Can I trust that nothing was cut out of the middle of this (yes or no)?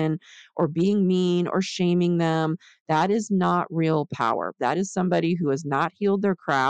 yes